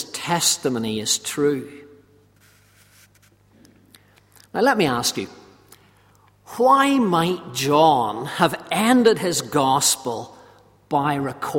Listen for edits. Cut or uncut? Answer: uncut